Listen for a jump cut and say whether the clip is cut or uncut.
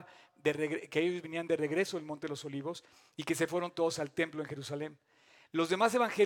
uncut